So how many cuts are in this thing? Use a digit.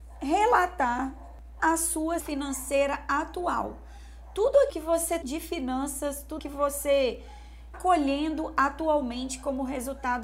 6